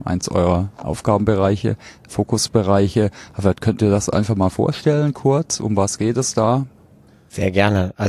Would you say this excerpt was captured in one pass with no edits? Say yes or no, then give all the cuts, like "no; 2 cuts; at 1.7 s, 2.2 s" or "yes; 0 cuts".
yes; 0 cuts